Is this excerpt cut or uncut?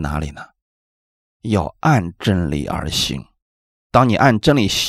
uncut